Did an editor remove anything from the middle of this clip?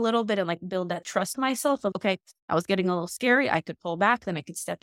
yes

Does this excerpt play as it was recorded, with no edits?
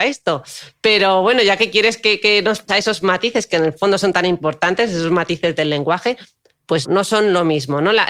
no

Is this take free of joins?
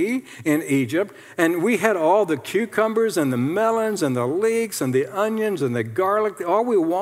yes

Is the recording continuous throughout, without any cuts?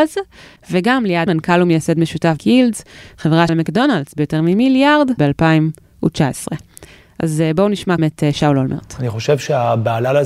no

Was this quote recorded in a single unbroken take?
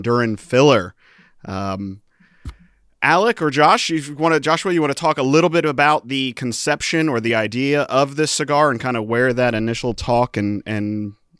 yes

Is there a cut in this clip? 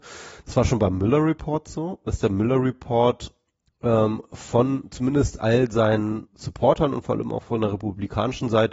yes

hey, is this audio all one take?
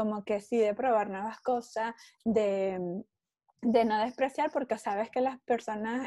yes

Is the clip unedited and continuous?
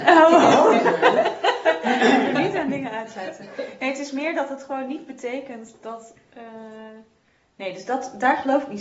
yes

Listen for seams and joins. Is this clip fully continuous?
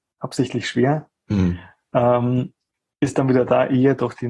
yes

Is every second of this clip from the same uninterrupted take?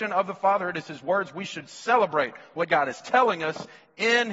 yes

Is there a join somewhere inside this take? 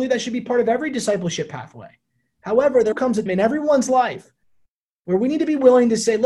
yes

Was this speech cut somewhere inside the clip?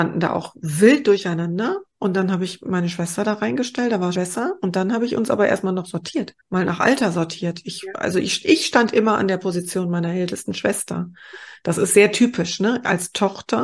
yes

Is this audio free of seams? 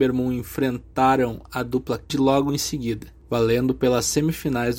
no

